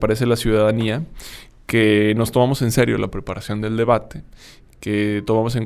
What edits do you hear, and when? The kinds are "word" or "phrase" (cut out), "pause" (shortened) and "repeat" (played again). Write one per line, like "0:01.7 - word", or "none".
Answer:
none

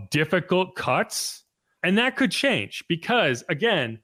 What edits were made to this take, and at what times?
none

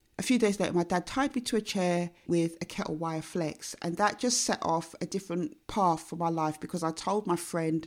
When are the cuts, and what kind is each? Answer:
0:02.3 - phrase
0:05.6 - pause

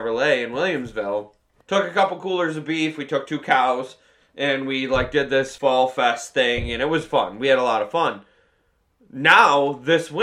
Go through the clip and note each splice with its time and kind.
none

